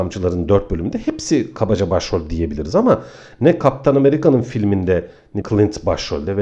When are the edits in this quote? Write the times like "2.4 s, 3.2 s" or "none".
5.4 s

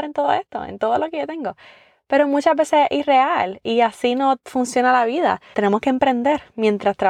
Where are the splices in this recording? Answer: none

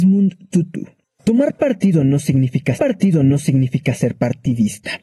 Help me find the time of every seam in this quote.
1.0 s, 2.8 s

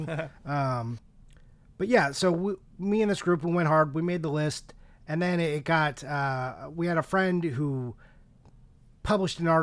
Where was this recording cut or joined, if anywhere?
none

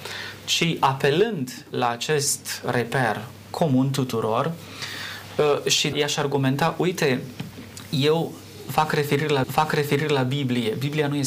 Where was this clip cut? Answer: 5.9 s, 9.4 s

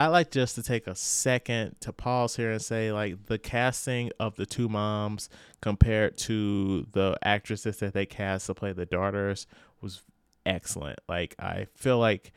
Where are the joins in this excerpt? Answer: none

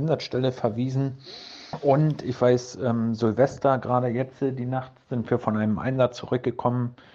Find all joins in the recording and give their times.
none

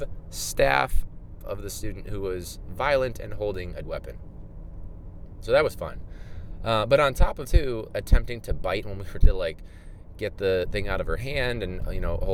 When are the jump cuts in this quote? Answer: 1.4 s, 2.6 s, 3.8 s, 7.4 s, 7.9 s, 8.8 s, 9.2 s

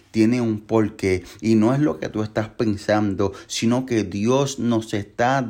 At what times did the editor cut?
none

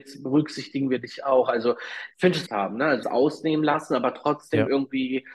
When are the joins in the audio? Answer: 2.5 s, 3.0 s

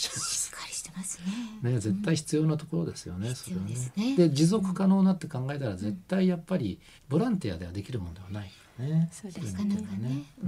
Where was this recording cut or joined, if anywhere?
7.0 s

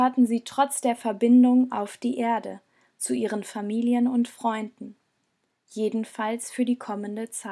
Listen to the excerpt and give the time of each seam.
none

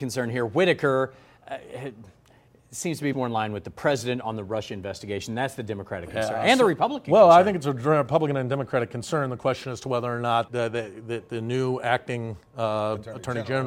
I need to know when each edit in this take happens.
3.1 s, 10.5 s

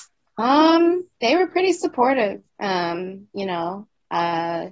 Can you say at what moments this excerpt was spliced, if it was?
1.1 s, 2.5 s

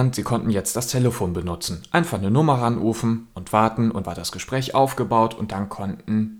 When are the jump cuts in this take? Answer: 4.0 s

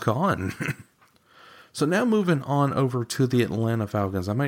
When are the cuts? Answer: 0.9 s

